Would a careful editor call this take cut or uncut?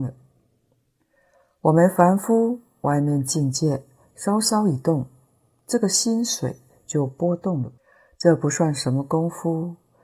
uncut